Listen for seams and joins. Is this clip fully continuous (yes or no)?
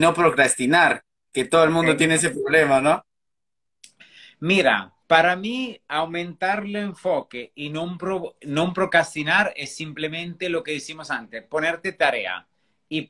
no